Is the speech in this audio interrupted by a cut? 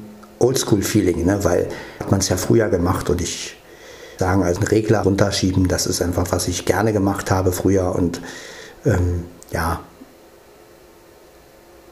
yes; 5 cuts; at 2.0 s, 4.2 s, 4.6 s, 5.0 s, 9.4 s

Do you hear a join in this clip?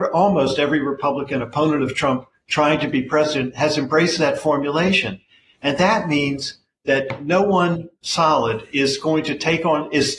no; 0 cuts

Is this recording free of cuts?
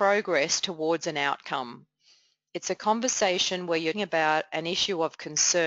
no; 1 cut; at 3.9 s

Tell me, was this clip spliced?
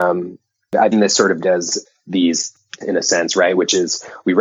yes; 3 cuts; at 0.9 s, 1.4 s, 2.8 s

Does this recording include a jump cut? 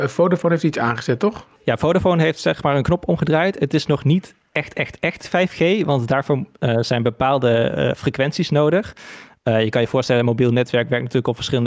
yes; 1 cut; at 1.5 s

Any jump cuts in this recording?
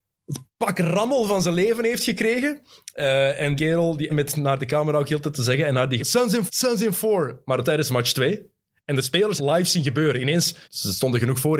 yes; 7 cuts; at 3.6 s, 4.1 s, 6.0 s, 6.5 s, 7.6 s, 9.4 s, 10.6 s

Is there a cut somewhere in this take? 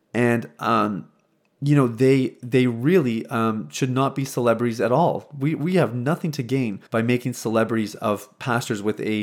yes; 1 cut; at 6.9 s

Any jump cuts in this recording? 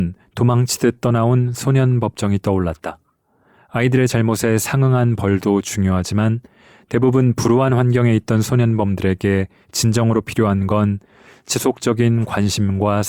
no; 0 cuts

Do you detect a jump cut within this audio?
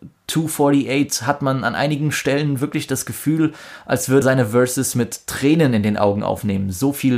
yes; 1 cut; at 4.2 s

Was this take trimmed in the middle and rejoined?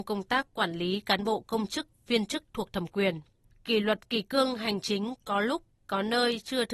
no; 0 cuts

